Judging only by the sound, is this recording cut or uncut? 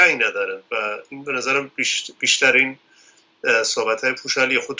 uncut